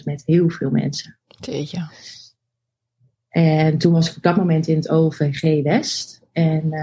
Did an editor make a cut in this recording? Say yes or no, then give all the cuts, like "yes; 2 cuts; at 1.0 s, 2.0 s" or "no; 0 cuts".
no; 0 cuts